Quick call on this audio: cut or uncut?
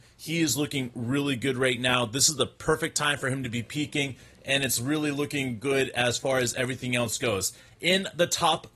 uncut